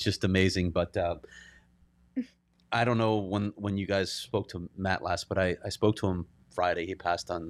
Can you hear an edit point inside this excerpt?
no; 0 cuts

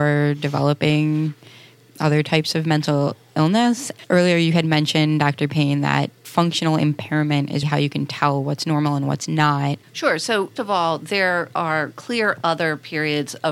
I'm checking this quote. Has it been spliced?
yes; 3 cuts; at 7.6 s, 9.8 s, 10.6 s

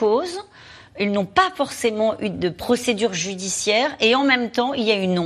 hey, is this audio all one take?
yes; 0 cuts

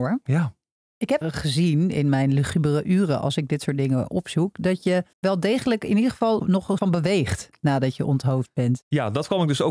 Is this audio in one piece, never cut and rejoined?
no; 4 cuts; at 1.2 s, 5.1 s, 6.4 s, 6.8 s

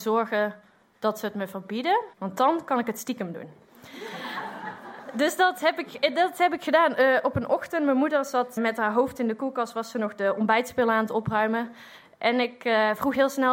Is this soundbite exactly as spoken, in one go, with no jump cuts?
no; 2 cuts; at 2.1 s, 8.6 s

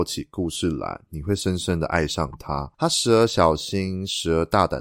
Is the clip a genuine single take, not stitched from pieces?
no; 1 cut; at 2.7 s

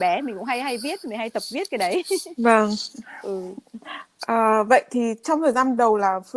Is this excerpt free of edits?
yes; 0 cuts

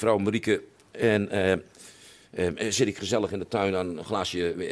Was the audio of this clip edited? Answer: no; 0 cuts

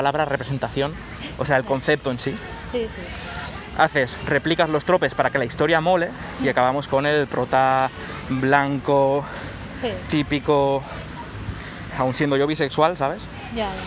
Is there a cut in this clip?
yes; 1 cut; at 11.9 s

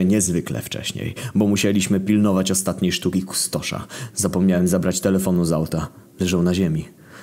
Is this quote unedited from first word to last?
yes; 0 cuts

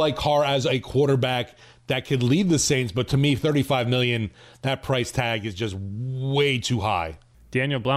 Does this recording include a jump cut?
no; 0 cuts

